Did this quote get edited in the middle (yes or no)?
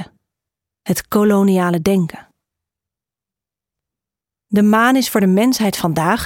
no